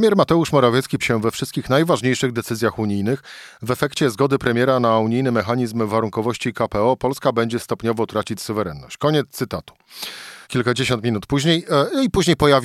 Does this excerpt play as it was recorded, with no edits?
no; 2 cuts; at 1.0 s, 10.4 s

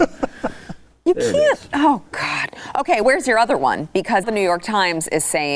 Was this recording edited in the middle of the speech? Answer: yes; 2 cuts; at 3.0 s, 4.2 s

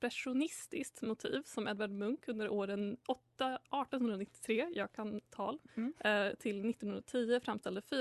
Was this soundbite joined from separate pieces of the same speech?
no; 0 cuts

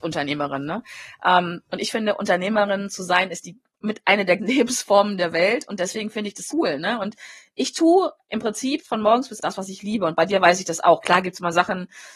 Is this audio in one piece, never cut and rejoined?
no; 4 cuts; at 4.4 s, 6.5 s, 8.8 s, 9.4 s

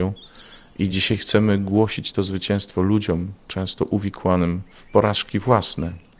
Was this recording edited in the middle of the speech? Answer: no; 0 cuts

